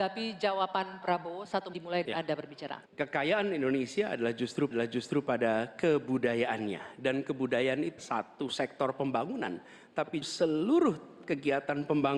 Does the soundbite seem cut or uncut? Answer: cut